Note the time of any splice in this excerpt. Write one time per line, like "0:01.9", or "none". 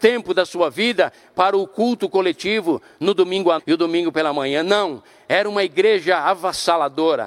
0:03.6